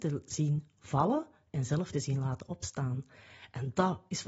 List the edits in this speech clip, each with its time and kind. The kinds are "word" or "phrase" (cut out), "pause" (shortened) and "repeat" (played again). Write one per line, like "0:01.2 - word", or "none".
none